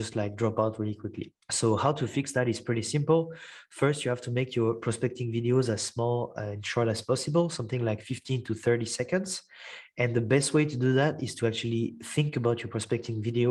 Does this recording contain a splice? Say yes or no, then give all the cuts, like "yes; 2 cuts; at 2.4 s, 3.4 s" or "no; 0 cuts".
yes; 1 cut; at 1.4 s